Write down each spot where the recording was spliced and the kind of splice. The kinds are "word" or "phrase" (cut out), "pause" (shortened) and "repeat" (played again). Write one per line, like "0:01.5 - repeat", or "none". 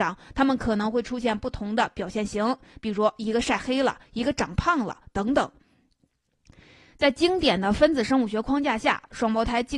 none